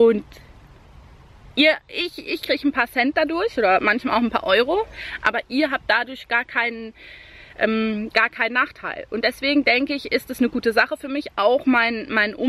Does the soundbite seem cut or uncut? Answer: uncut